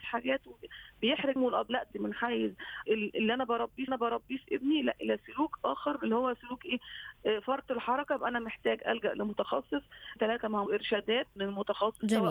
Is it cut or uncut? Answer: cut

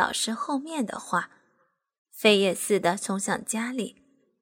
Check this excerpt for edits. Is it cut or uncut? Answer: uncut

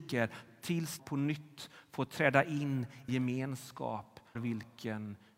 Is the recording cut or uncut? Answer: cut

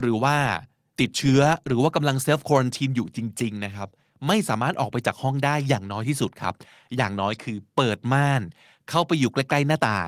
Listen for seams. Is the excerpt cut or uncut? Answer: uncut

